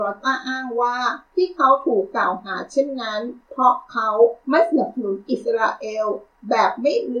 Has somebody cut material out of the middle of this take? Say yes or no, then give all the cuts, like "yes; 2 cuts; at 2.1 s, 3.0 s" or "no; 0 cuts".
yes; 2 cuts; at 1.2 s, 3.4 s